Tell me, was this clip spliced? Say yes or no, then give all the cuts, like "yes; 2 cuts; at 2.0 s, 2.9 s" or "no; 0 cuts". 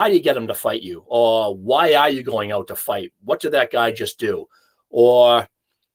no; 0 cuts